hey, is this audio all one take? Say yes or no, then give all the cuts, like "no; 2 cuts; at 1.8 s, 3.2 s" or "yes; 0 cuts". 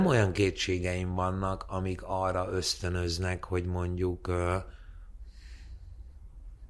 yes; 0 cuts